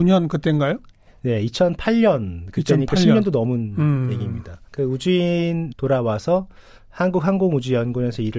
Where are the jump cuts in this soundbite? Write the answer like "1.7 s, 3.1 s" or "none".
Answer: 4.7 s, 5.7 s